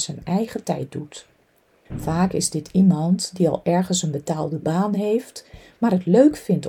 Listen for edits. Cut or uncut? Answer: uncut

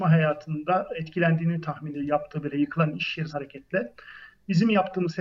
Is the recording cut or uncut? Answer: cut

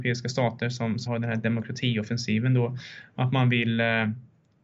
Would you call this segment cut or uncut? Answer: cut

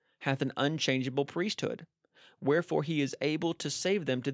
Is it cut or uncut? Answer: uncut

